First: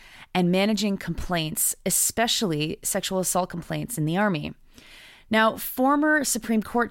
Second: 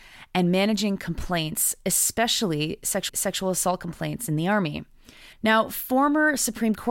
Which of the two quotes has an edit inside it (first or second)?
second